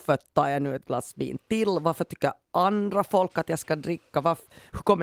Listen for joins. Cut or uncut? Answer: uncut